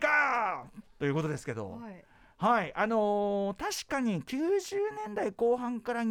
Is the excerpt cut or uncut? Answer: uncut